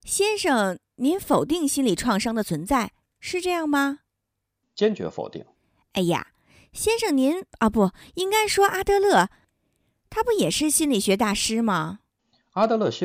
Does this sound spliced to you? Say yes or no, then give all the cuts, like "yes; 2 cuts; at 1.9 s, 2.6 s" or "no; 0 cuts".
no; 0 cuts